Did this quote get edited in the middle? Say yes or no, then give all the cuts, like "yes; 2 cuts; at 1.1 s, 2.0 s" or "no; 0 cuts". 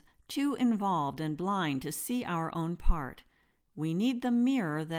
no; 0 cuts